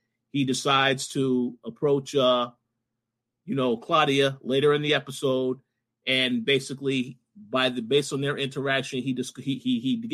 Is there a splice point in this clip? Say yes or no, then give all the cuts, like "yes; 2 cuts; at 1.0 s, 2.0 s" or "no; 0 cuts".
no; 0 cuts